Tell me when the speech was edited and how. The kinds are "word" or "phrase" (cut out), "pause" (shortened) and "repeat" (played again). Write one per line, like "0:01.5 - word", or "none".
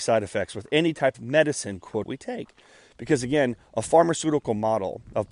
0:01.1 - word
0:02.0 - word